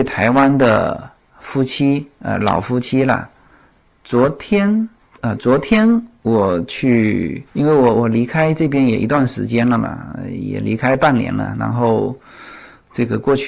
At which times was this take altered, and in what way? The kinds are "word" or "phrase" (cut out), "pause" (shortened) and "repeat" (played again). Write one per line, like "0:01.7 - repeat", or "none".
0:05.4 - word
0:07.5 - pause